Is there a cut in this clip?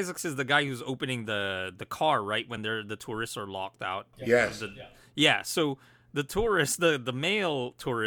no; 0 cuts

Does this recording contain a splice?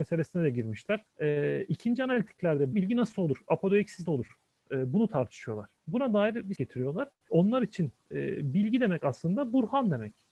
yes; 5 cuts; at 1.1 s, 2.7 s, 4.1 s, 5.8 s, 6.6 s

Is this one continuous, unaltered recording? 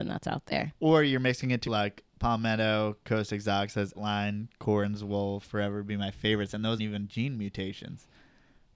no; 3 cuts; at 1.7 s, 3.9 s, 6.8 s

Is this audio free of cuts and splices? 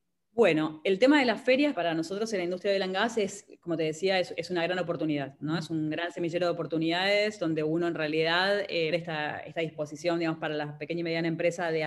no; 2 cuts; at 1.7 s, 8.9 s

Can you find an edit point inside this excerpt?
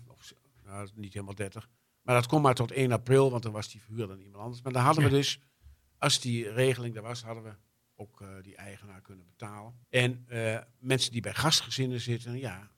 yes; 1 cut; at 9.8 s

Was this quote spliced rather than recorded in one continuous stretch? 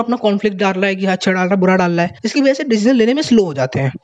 yes; 1 cut; at 2.2 s

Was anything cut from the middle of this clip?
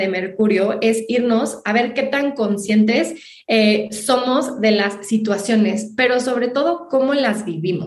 no; 0 cuts

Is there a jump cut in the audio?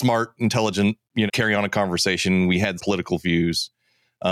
yes; 2 cuts; at 1.3 s, 2.8 s

